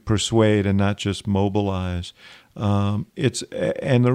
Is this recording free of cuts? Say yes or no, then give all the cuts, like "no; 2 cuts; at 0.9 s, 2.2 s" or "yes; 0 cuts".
yes; 0 cuts